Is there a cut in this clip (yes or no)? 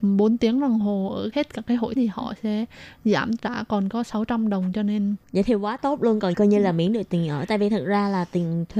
yes